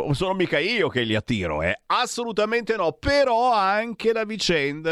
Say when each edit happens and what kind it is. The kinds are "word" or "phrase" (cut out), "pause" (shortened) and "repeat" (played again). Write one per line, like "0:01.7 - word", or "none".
none